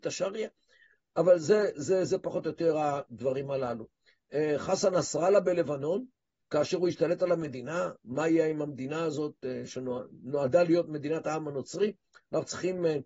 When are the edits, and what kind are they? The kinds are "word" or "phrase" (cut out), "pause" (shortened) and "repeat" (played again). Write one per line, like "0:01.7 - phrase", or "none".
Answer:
none

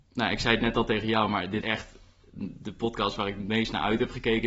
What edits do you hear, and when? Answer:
0:01.6 - word

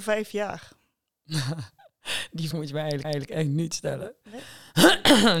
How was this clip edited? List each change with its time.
0:02.5 - word
0:03.0 - repeat

